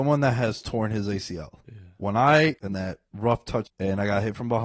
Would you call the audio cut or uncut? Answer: cut